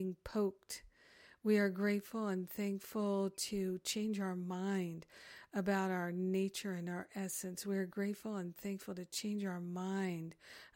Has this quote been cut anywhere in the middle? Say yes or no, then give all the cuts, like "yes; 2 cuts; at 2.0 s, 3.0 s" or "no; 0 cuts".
no; 0 cuts